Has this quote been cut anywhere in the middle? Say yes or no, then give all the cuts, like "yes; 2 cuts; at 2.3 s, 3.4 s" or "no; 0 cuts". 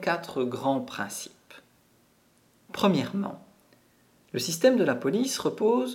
no; 0 cuts